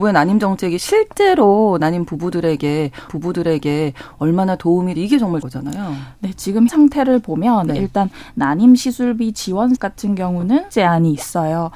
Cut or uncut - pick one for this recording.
cut